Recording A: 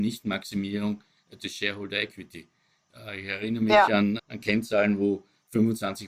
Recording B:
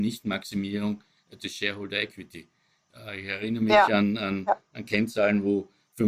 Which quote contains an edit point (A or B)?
A